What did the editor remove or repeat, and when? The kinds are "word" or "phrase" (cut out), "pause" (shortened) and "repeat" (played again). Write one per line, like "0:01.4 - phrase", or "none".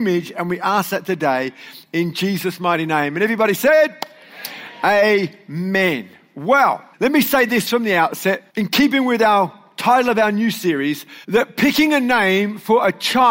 0:06.9 - pause
0:08.5 - pause
0:11.2 - pause